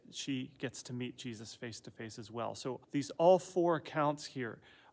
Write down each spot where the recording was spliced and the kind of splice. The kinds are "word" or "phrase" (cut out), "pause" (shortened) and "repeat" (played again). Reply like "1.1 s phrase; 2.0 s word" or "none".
2.8 s pause